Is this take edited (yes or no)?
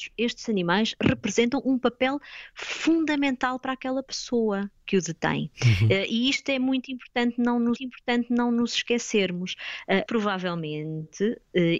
yes